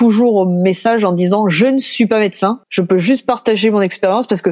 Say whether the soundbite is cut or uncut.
cut